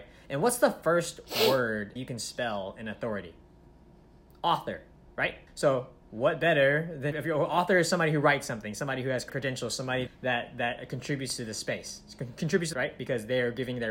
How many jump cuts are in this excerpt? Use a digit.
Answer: 6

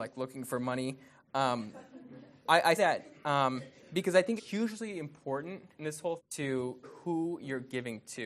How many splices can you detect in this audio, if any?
6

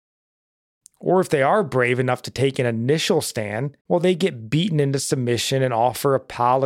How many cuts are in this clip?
1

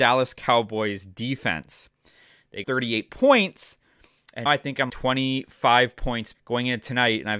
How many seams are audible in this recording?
4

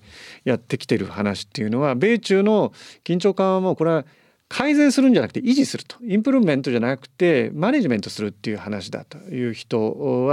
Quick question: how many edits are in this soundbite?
0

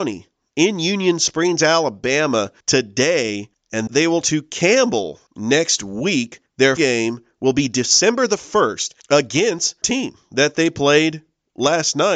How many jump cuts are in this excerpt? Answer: 6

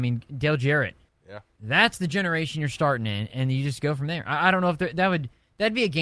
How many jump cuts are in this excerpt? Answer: 1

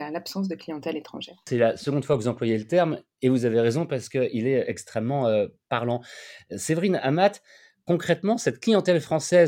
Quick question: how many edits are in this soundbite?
0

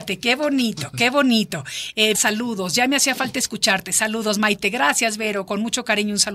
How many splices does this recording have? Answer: 1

